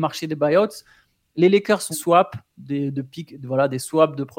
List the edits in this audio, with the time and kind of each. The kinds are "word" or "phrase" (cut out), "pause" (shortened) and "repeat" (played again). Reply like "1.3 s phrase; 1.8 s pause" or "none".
1.9 s word